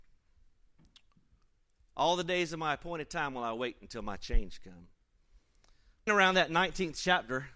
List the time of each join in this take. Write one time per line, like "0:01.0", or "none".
0:06.1